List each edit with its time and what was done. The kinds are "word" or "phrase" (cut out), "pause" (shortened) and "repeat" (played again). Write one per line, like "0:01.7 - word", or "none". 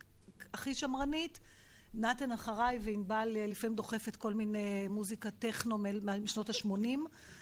none

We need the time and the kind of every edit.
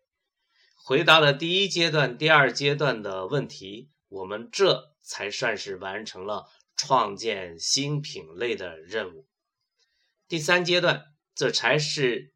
none

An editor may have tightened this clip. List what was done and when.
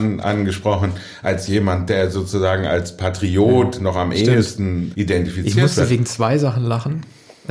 0:04.9 - word

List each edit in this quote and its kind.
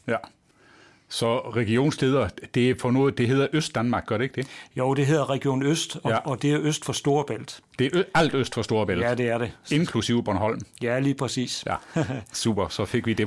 none

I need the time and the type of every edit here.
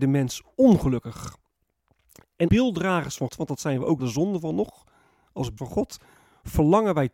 0:02.5 - word
0:03.3 - word
0:04.0 - word
0:05.6 - word

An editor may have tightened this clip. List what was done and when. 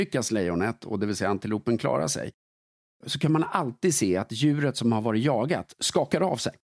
none

